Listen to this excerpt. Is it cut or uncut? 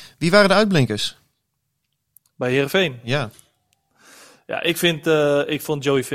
uncut